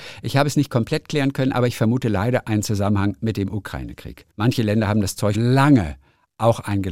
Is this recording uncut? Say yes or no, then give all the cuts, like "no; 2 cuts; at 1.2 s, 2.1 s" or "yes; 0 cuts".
no; 2 cuts; at 4.3 s, 5.3 s